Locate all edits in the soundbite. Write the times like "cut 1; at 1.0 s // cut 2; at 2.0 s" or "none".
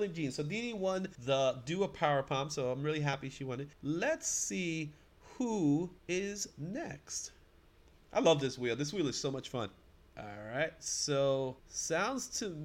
cut 1; at 1.1 s // cut 2; at 3.7 s // cut 3; at 6.0 s // cut 4; at 7.7 s // cut 5; at 9.9 s // cut 6; at 11.6 s